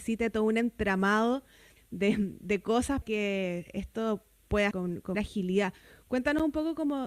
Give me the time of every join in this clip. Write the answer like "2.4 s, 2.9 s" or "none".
1.8 s, 3.0 s, 4.7 s, 5.1 s